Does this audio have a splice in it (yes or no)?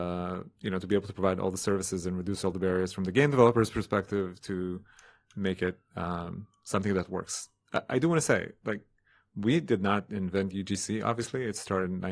no